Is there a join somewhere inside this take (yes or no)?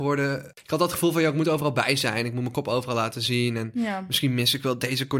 no